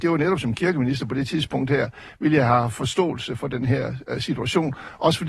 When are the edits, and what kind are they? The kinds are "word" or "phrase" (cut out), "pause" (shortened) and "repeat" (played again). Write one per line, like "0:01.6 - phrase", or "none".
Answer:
none